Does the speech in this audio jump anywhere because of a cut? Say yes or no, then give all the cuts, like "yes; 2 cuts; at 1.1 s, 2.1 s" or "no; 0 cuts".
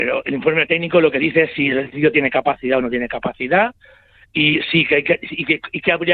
no; 0 cuts